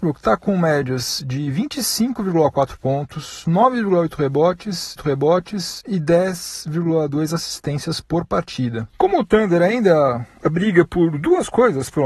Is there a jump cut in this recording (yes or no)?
yes